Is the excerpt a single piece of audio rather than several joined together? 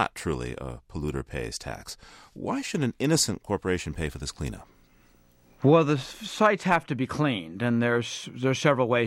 yes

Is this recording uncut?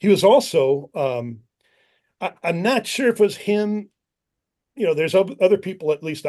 yes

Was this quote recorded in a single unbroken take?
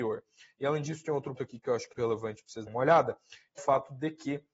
no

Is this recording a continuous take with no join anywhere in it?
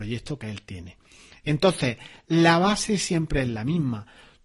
yes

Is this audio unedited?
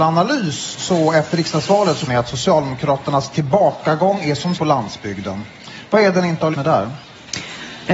no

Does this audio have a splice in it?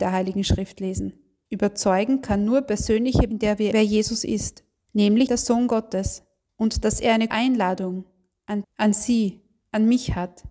yes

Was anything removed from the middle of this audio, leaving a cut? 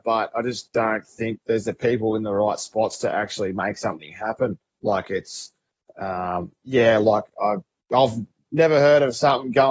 no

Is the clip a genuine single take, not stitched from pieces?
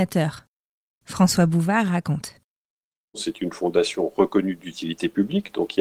yes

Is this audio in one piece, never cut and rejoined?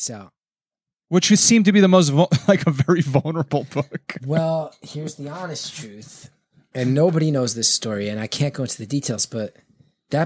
yes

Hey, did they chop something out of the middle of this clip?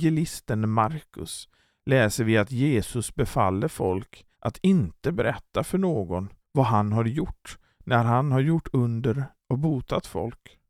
yes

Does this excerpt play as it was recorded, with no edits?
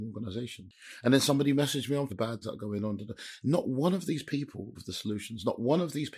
no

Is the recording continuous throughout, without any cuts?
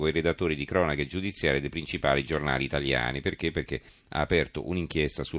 no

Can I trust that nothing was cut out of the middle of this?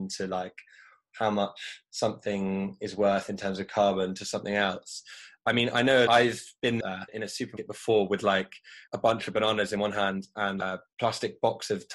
yes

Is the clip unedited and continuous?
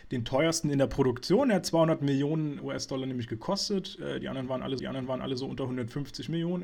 no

